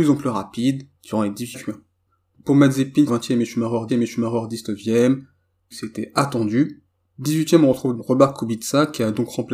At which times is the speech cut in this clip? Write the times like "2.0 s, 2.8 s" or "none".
0.9 s, 1.5 s, 3.1 s, 3.9 s, 5.7 s, 8.0 s